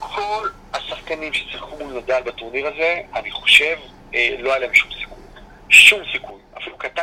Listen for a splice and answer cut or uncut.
uncut